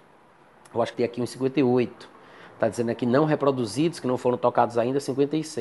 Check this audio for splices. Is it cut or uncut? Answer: cut